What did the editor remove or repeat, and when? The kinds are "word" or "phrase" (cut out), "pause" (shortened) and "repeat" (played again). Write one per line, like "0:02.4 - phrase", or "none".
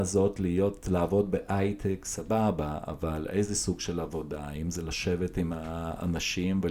none